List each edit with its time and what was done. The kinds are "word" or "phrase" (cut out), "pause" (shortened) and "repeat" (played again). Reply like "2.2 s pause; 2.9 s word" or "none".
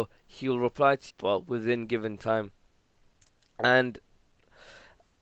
1.1 s word